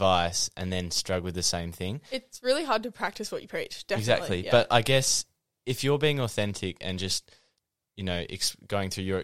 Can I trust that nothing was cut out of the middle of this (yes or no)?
yes